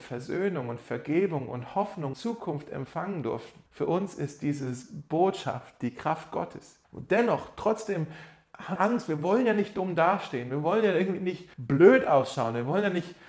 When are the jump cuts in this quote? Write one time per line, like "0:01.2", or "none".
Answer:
0:02.1
0:03.7
0:06.8
0:08.8
0:11.5